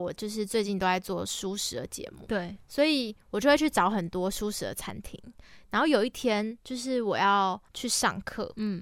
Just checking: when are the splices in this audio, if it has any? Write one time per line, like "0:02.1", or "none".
0:06.6
0:07.7